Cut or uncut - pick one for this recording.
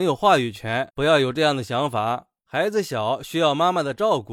cut